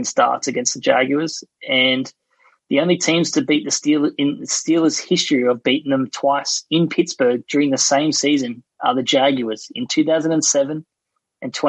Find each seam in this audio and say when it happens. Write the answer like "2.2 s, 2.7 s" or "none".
none